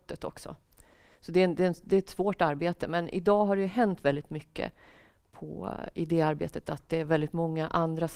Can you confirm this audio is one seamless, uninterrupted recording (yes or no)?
yes